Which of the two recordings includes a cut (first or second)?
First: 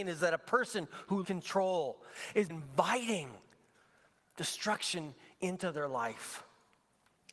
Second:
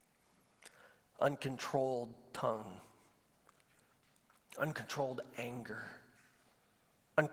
first